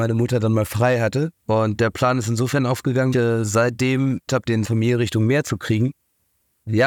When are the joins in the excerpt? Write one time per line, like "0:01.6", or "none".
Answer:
0:01.4
0:03.1
0:04.3
0:04.6